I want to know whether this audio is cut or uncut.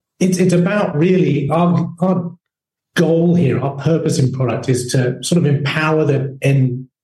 uncut